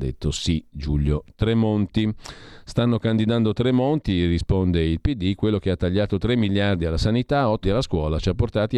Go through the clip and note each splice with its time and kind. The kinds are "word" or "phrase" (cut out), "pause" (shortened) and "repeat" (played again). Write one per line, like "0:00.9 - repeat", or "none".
0:07.6 - word